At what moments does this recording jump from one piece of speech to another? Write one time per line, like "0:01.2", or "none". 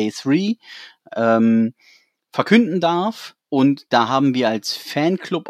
0:03.4